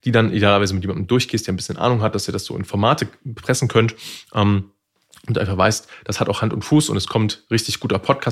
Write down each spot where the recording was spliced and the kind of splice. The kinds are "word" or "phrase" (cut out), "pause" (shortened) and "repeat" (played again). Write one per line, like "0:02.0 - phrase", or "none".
none